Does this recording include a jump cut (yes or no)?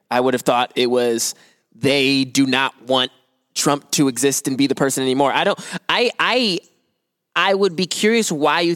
no